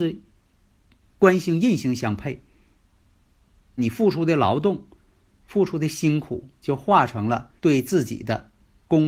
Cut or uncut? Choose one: cut